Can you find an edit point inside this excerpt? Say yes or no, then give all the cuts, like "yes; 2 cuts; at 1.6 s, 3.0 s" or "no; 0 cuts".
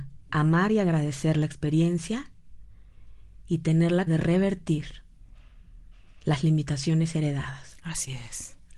yes; 1 cut; at 4.1 s